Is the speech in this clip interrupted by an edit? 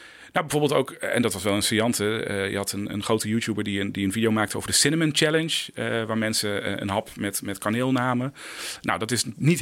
no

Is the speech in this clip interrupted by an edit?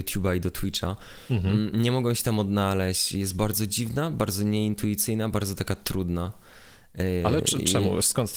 no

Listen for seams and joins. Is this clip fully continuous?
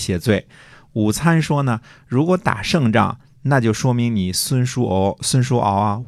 yes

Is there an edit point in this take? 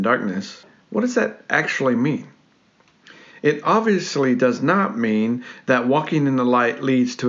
no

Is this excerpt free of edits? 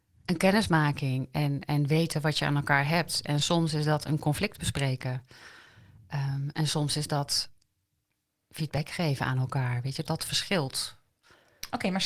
no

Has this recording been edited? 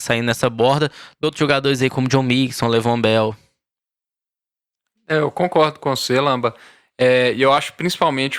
yes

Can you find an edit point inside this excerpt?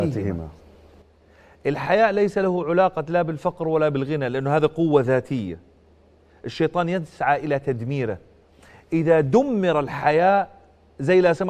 no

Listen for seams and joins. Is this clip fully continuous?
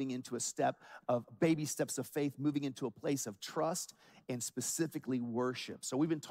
yes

